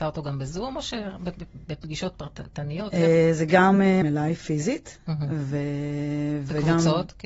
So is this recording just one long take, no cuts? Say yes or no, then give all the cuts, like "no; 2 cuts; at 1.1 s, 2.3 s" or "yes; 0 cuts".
no; 1 cut; at 4.0 s